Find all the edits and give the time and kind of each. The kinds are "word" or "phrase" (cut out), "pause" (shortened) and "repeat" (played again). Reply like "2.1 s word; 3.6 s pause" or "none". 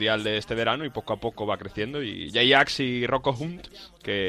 none